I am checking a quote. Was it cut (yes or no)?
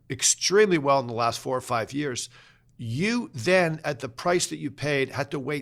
no